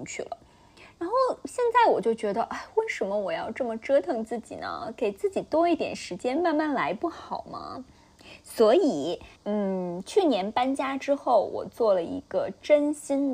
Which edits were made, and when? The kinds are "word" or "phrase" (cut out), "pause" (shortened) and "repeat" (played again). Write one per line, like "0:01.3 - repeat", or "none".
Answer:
0:09.4 - pause